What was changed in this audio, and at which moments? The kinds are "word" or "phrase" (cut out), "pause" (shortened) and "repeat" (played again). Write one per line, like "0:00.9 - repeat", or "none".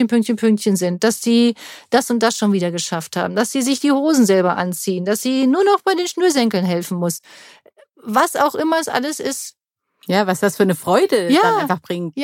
none